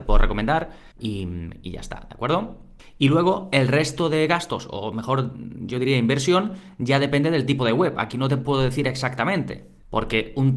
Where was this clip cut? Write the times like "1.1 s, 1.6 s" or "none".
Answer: 0.9 s